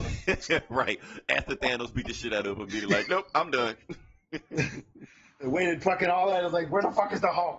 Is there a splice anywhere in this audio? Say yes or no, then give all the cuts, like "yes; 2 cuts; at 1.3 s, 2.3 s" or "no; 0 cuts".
no; 0 cuts